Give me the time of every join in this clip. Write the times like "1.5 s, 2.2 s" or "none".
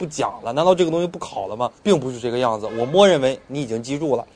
1.8 s